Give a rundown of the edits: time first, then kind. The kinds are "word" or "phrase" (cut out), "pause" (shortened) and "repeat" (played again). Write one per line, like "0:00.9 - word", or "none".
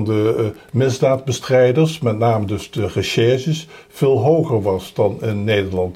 none